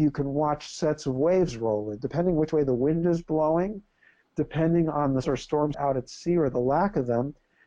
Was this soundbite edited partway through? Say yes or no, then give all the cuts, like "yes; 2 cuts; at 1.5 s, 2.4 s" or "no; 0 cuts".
yes; 2 cuts; at 5.2 s, 5.7 s